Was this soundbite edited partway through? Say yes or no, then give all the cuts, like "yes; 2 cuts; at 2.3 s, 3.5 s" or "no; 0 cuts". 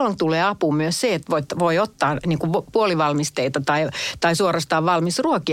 no; 0 cuts